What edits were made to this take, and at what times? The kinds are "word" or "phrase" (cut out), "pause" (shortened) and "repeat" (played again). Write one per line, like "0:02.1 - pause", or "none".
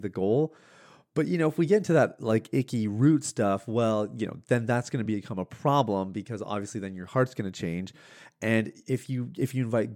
none